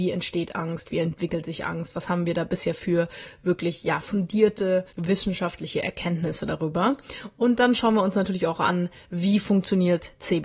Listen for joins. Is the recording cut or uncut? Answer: cut